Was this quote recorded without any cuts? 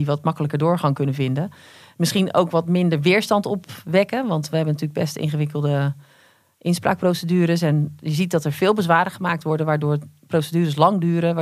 yes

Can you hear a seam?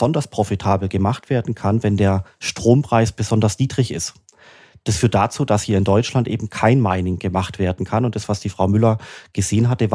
no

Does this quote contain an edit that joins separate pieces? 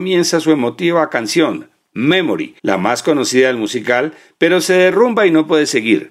yes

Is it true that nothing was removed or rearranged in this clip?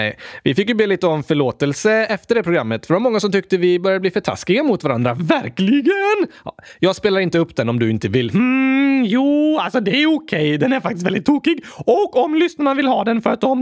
yes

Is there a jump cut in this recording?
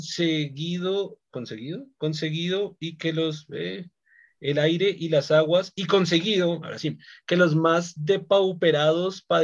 no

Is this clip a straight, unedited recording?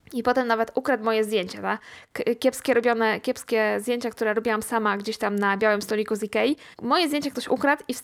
no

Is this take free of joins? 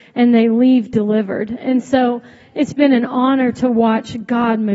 yes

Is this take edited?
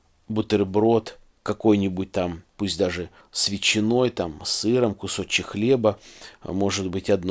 no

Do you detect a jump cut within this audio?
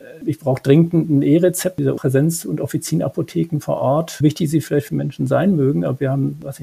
yes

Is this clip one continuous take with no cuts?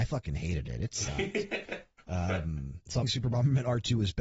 no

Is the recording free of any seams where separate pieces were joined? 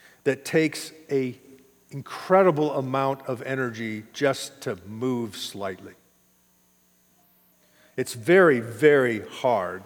yes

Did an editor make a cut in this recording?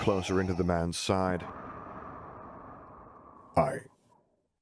no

